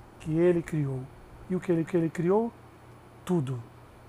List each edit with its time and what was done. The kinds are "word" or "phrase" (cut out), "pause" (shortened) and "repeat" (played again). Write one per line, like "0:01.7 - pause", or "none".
0:01.9 - repeat